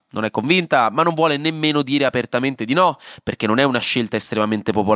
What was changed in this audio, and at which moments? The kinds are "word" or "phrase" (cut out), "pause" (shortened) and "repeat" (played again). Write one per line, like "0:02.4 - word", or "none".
none